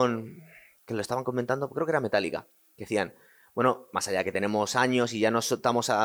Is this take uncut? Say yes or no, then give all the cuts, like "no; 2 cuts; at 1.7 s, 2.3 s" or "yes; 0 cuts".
yes; 0 cuts